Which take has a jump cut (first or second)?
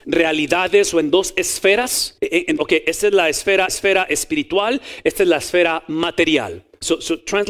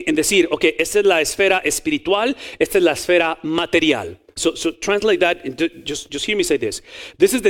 first